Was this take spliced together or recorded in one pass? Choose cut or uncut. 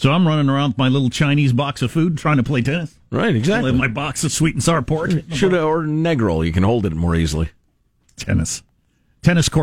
uncut